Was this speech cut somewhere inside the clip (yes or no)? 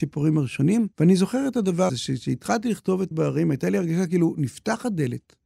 yes